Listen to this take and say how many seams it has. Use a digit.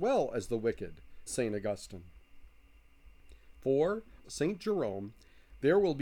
2